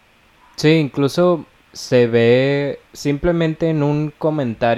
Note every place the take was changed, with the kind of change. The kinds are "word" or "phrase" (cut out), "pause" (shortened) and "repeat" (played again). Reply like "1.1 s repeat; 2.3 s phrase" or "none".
1.6 s phrase; 2.9 s pause